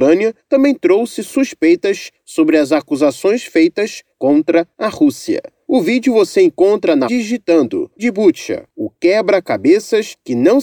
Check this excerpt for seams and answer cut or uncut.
cut